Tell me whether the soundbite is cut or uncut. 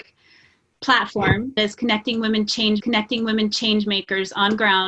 cut